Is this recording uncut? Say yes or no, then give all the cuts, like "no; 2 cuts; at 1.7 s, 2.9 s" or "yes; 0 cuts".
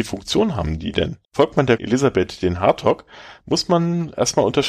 no; 2 cuts; at 1.2 s, 1.8 s